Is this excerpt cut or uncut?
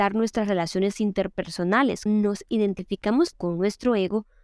cut